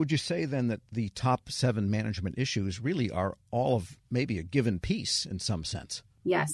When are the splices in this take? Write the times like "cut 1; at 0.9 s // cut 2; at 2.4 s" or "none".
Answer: cut 1; at 4.0 s